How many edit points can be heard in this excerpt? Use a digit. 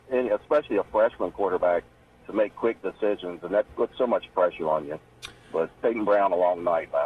3